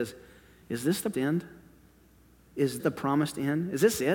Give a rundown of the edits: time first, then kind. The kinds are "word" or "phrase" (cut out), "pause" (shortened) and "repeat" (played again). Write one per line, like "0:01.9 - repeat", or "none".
0:01.1 - word
0:02.8 - word